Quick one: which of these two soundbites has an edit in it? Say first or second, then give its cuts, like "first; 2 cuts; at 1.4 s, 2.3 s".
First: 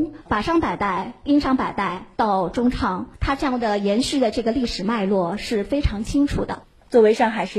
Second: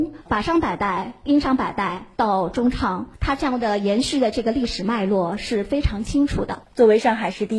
second; 1 cut; at 6.7 s